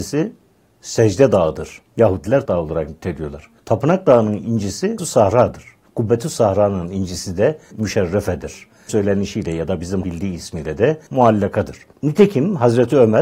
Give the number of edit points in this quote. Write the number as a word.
eight